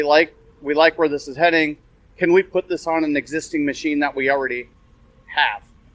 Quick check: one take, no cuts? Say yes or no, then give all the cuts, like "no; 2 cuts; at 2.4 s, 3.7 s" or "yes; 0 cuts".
yes; 0 cuts